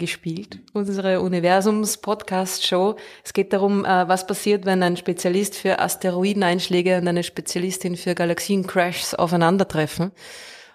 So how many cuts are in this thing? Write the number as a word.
zero